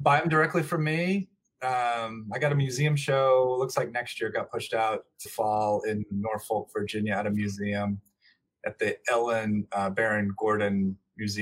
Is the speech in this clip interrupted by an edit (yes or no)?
yes